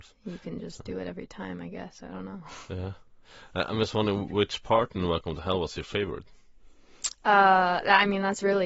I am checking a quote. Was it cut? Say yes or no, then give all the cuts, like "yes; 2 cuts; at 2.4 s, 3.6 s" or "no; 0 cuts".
no; 0 cuts